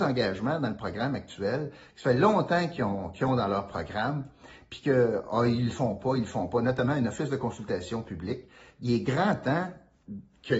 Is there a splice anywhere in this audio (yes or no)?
no